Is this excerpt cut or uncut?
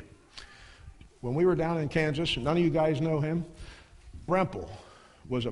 cut